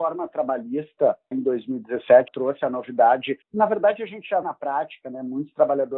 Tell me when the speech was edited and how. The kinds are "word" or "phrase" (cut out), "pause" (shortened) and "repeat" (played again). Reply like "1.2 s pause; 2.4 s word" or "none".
1.3 s word; 2.3 s word; 3.4 s pause; 4.4 s word